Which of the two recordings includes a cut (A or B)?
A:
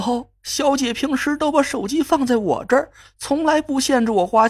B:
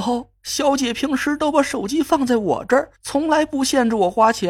B